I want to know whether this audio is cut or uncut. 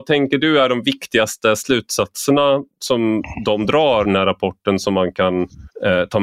cut